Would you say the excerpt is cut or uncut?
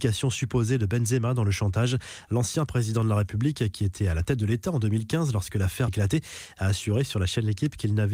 cut